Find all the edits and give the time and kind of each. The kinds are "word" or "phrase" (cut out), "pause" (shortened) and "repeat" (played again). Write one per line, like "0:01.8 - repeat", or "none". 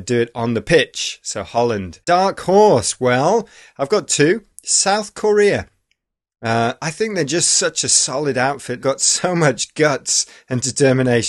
0:02.0 - pause
0:08.8 - phrase